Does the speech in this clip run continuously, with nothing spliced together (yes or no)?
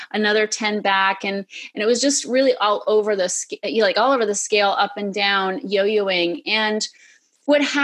yes